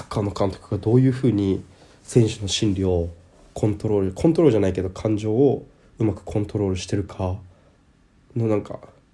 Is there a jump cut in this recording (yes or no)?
no